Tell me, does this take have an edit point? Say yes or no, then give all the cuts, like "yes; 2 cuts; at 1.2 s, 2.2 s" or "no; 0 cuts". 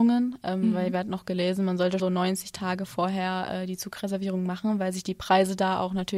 yes; 1 cut; at 2.0 s